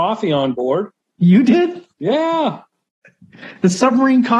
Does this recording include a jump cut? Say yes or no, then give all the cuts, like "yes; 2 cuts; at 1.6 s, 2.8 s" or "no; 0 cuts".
yes; 2 cuts; at 1.0 s, 1.9 s